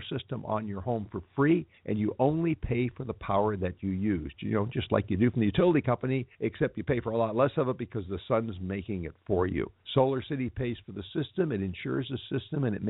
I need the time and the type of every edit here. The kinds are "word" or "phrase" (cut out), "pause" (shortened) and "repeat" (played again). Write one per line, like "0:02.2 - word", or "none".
0:01.8 - pause
0:06.3 - pause
0:09.8 - pause